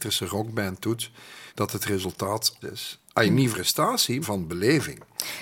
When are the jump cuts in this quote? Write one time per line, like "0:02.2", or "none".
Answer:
0:01.5
0:02.6
0:03.5
0:04.2